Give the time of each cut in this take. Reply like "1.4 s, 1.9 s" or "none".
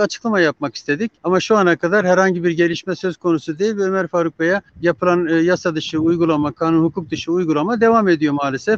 1.2 s, 4.7 s